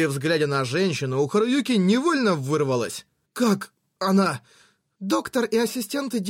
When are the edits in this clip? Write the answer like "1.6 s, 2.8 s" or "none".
none